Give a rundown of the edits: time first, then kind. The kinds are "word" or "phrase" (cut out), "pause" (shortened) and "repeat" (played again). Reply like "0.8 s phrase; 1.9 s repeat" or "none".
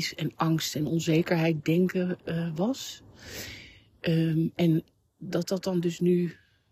none